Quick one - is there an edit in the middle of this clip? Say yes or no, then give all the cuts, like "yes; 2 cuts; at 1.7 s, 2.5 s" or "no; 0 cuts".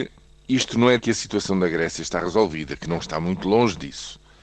yes; 2 cuts; at 1.0 s, 3.0 s